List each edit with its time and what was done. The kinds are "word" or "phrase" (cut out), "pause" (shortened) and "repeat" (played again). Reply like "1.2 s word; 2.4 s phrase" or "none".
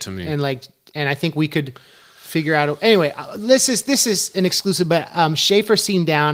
none